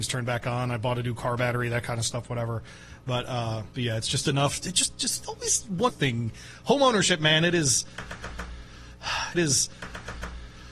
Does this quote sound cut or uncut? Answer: cut